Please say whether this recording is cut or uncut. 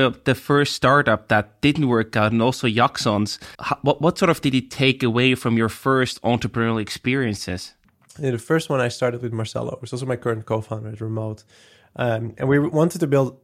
cut